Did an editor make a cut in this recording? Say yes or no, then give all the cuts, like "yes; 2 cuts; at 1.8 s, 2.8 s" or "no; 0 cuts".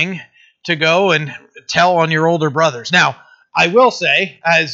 no; 0 cuts